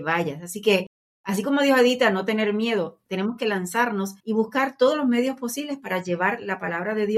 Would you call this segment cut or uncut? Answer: cut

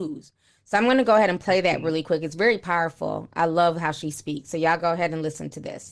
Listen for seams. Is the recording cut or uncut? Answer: uncut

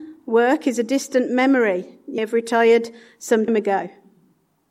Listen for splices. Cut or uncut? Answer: cut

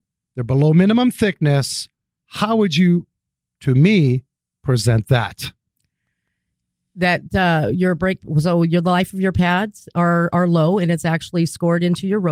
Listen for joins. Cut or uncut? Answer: uncut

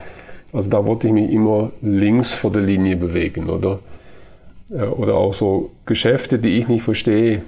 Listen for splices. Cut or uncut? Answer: uncut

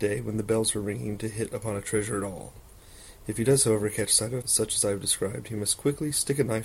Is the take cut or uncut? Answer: cut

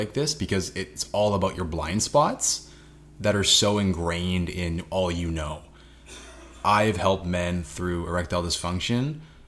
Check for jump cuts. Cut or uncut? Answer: uncut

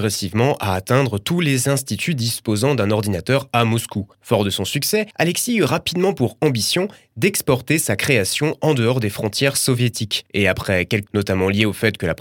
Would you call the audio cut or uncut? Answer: cut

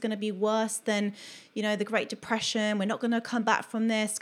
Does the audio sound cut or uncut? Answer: uncut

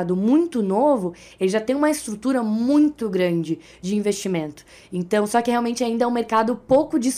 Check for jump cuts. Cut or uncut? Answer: uncut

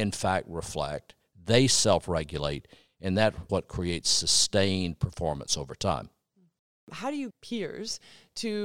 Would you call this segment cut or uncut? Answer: cut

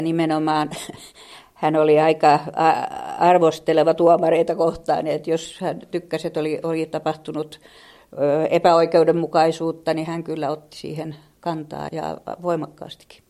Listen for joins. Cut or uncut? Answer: cut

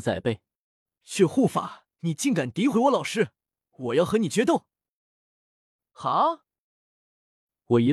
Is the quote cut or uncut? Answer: cut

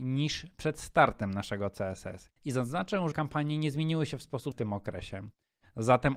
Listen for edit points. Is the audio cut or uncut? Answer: cut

